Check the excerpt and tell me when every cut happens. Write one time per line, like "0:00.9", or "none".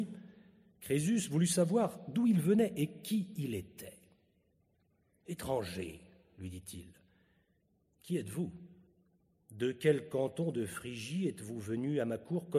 none